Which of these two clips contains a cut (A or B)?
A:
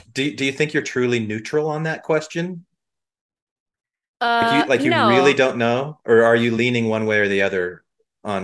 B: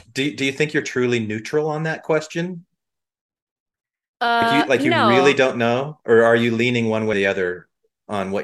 B